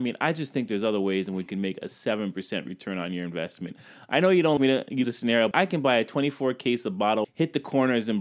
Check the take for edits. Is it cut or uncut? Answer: cut